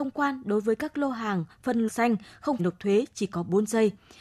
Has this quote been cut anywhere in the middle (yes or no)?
yes